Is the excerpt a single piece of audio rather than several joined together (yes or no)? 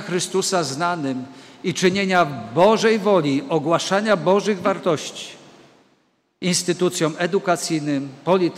yes